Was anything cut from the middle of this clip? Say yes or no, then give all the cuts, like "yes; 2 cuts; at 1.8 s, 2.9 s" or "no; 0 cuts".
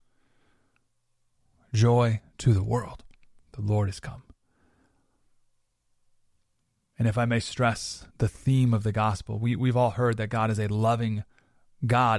yes; 2 cuts; at 3.4 s, 8.1 s